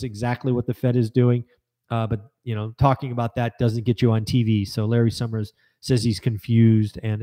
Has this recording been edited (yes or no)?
no